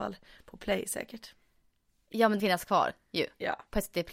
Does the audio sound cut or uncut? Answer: cut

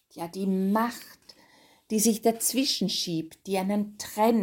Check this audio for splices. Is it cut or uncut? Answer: uncut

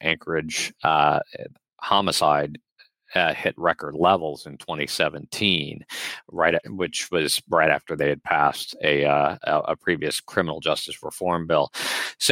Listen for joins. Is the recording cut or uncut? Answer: uncut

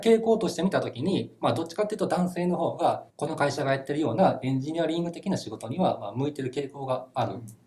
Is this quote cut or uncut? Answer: cut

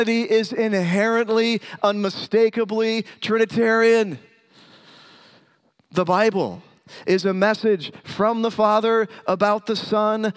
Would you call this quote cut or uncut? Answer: uncut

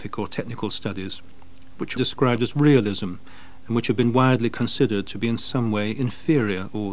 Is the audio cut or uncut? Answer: cut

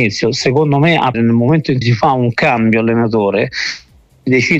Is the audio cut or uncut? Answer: cut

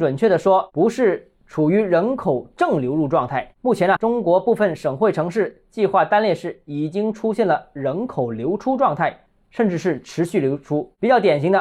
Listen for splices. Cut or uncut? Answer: cut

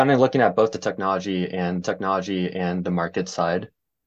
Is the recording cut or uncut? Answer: cut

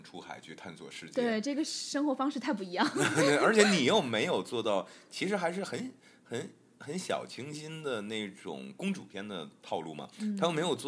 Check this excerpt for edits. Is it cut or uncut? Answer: uncut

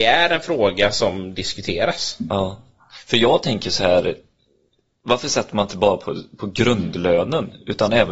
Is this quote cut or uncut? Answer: uncut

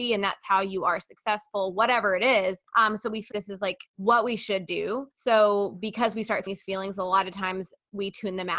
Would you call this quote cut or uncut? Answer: cut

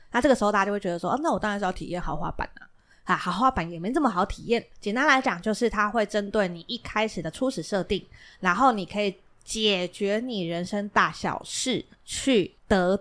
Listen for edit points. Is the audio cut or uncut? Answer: uncut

